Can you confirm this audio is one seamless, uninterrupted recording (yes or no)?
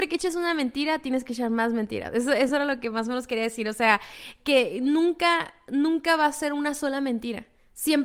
yes